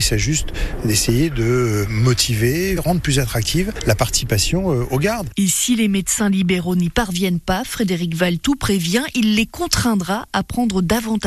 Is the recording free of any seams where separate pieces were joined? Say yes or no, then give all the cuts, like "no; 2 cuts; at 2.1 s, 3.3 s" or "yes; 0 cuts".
no; 1 cut; at 2.8 s